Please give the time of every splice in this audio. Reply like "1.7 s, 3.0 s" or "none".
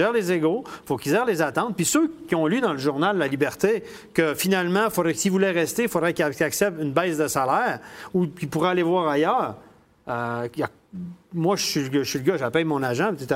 none